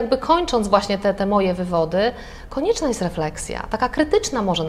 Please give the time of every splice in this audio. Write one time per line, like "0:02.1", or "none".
0:01.2

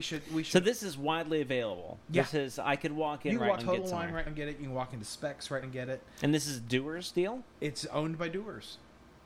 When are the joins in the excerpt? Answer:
0:03.6
0:04.3
0:05.6

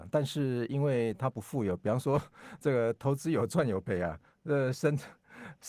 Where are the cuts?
none

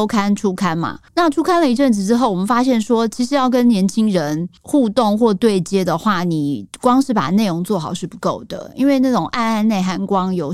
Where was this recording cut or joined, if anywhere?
0:01.1

